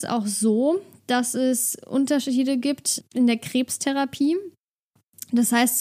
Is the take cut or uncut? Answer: cut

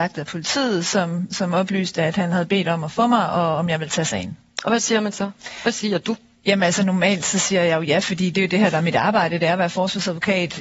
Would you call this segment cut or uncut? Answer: uncut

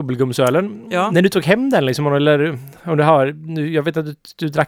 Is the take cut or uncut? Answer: uncut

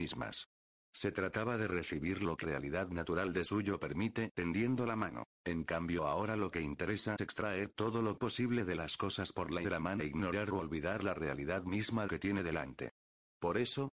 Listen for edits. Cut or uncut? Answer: cut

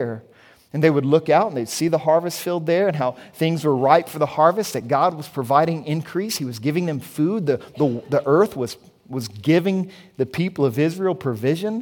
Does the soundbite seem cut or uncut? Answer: uncut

